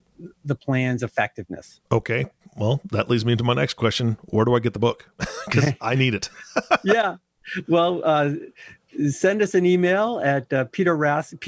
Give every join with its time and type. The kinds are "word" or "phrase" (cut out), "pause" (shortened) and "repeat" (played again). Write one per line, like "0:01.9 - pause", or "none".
0:01.9 - pause